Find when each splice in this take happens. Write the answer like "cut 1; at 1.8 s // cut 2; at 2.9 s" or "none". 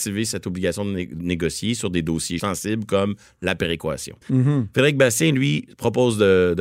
cut 1; at 4.2 s

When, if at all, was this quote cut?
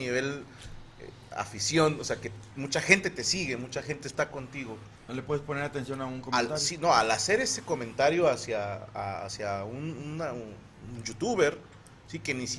cut 1; at 5.0 s

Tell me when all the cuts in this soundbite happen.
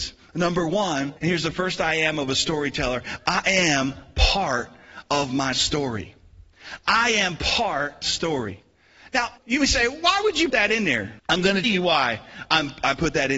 cut 1; at 1.2 s // cut 2; at 8.0 s // cut 3; at 9.4 s // cut 4; at 10.5 s // cut 5; at 11.2 s // cut 6; at 11.6 s

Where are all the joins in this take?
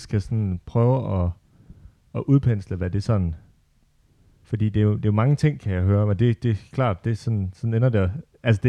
none

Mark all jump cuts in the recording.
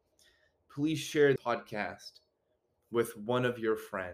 cut 1; at 1.4 s

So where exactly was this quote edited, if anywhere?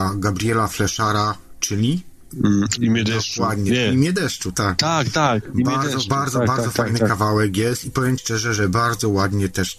cut 1; at 2.8 s // cut 2; at 4.5 s // cut 3; at 8.2 s

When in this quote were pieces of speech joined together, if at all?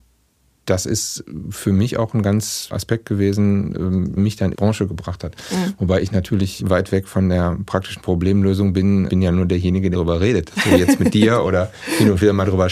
cut 1; at 2.7 s // cut 2; at 4.2 s // cut 3; at 4.5 s // cut 4; at 6.6 s // cut 5; at 9.1 s // cut 6; at 9.9 s

